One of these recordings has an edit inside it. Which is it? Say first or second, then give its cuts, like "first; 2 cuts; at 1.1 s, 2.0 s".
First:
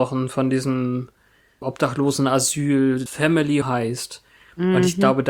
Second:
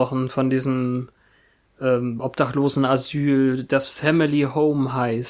first; 3 cuts; at 1.6 s, 3.1 s, 3.6 s